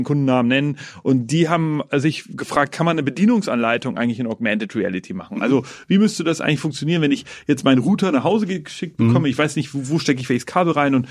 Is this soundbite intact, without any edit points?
yes; 0 cuts

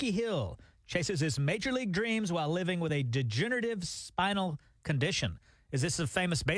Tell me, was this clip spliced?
no; 0 cuts

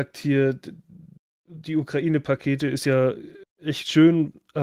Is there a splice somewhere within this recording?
no; 0 cuts

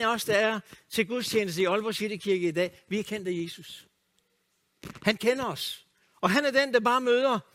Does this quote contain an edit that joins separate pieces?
yes; 1 cut; at 5.9 s

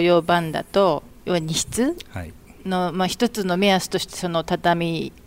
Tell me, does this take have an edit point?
no; 0 cuts

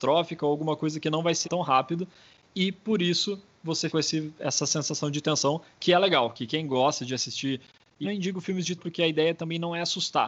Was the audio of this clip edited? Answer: yes; 4 cuts; at 1.4 s, 3.9 s, 8.0 s, 8.8 s

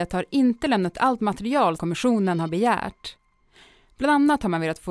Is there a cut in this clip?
yes; 2 cuts; at 0.9 s, 1.8 s

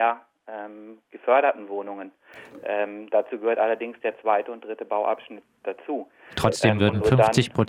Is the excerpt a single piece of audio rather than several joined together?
yes; 0 cuts

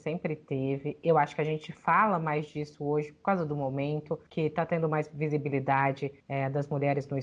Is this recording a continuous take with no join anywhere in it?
no; 2 cuts; at 4.3 s, 6.2 s

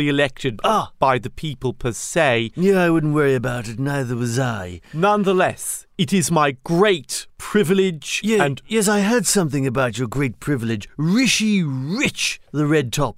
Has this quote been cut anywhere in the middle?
no; 0 cuts

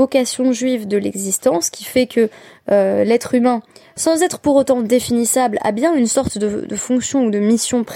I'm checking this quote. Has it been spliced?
no; 0 cuts

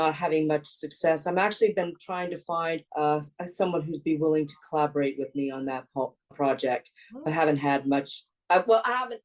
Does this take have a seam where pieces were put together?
yes; 2 cuts; at 2.9 s, 6.3 s

